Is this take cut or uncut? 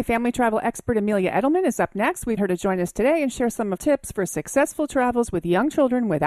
cut